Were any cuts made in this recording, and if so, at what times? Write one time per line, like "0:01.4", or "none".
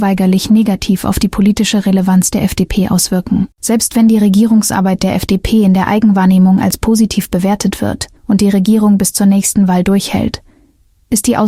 0:03.5
0:08.2